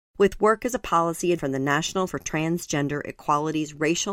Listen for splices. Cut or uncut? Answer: cut